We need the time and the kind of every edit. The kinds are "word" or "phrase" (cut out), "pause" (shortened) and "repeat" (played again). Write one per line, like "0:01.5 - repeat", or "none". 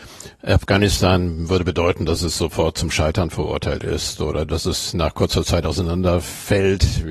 none

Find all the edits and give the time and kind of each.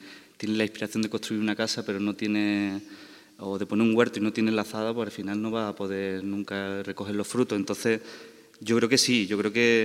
none

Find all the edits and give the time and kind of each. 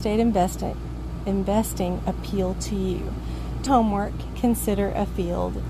0:02.0 - word
0:03.7 - word
0:04.3 - word

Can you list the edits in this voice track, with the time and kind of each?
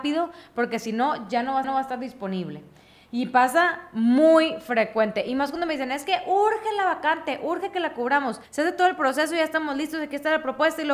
0:01.6 - repeat
0:08.4 - pause

